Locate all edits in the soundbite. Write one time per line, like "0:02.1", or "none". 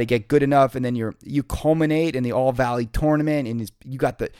none